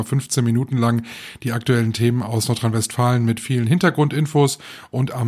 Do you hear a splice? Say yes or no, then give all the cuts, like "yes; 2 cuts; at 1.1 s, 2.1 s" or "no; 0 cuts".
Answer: no; 0 cuts